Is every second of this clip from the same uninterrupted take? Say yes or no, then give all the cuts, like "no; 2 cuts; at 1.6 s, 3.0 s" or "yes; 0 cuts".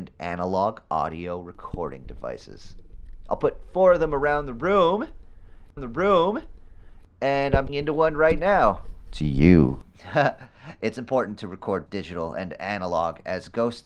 no; 4 cuts; at 5.8 s, 7.7 s, 9.9 s, 11.9 s